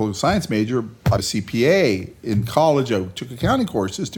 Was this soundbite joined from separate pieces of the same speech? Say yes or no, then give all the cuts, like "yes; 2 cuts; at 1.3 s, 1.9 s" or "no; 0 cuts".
yes; 1 cut; at 1.2 s